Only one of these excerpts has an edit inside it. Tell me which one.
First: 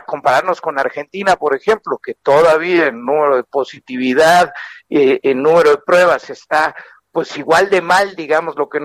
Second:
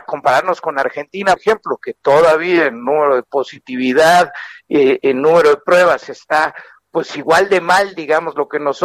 second; 1 cut; at 1.4 s

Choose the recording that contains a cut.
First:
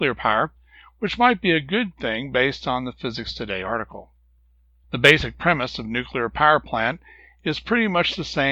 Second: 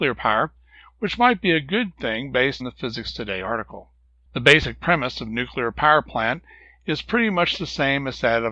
second; 2 cuts; at 2.6 s, 4.0 s

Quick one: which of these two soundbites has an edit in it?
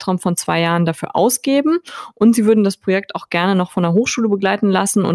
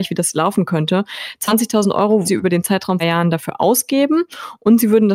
second; 2 cuts; at 2.2 s, 3.0 s

